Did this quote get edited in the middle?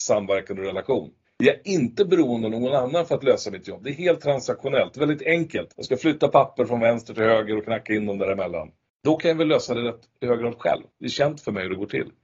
yes; 4 cuts; at 1.2 s, 5.7 s, 8.9 s, 10.9 s

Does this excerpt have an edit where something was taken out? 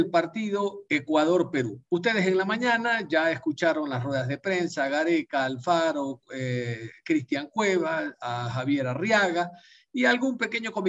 no; 0 cuts

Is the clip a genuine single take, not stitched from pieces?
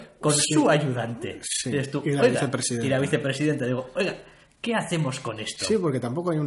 yes; 0 cuts

